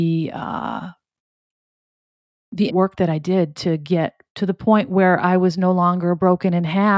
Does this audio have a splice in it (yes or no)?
yes